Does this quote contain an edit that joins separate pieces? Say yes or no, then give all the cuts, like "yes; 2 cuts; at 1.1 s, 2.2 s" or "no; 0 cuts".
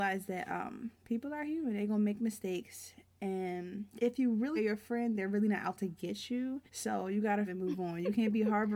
yes; 5 cuts; at 0.9 s, 3.9 s, 4.6 s, 6.7 s, 7.5 s